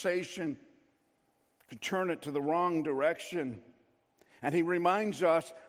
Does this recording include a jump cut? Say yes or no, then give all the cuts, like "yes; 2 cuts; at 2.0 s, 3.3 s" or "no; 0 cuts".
no; 0 cuts